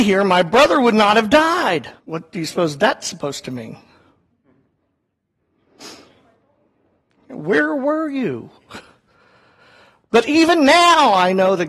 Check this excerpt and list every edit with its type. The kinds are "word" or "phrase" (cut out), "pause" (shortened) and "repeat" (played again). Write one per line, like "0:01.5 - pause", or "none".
0:02.0 - pause